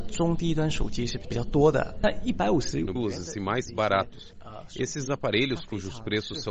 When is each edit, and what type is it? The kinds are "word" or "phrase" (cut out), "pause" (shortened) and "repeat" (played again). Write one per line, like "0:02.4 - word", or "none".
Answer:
0:03.0 - word
0:03.7 - word